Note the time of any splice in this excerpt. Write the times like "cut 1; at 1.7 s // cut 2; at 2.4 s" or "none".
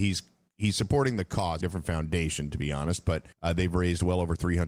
cut 1; at 1.6 s // cut 2; at 3.3 s